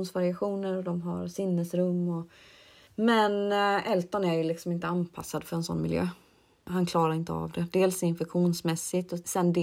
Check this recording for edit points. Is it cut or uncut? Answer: uncut